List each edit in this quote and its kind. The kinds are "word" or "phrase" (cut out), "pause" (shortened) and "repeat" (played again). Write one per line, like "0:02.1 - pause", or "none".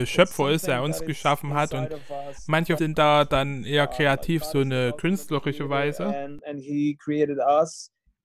0:02.8 - phrase
0:04.4 - word